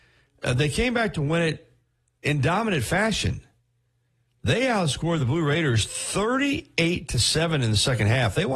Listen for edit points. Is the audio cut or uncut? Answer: uncut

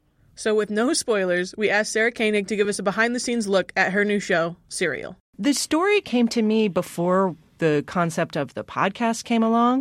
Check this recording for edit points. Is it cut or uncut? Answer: uncut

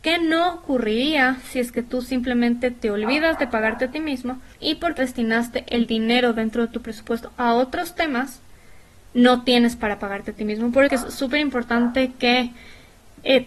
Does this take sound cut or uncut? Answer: cut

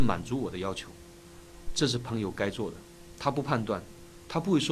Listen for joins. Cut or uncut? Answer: cut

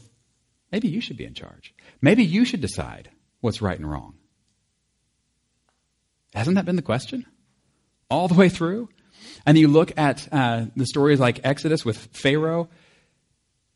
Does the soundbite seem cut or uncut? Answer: uncut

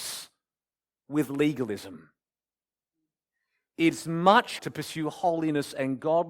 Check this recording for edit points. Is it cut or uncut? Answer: cut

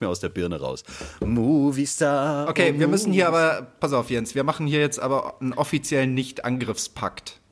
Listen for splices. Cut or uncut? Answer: uncut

